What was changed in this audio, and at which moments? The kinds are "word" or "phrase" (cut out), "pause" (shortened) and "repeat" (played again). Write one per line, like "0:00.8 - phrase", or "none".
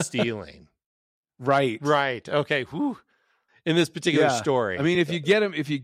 none